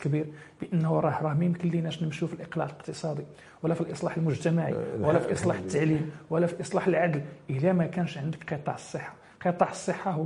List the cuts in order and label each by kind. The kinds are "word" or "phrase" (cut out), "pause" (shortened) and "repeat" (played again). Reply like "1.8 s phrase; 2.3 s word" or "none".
none

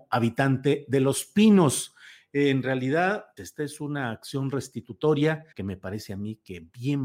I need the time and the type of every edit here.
3.4 s word; 5.5 s pause

